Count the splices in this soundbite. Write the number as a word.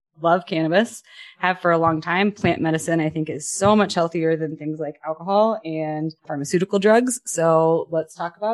one